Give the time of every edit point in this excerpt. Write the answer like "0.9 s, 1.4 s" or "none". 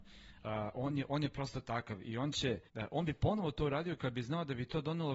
2.7 s